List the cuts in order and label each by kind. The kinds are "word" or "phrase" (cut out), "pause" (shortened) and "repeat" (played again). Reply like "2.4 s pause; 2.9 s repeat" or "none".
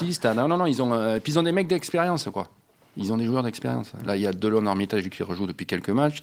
none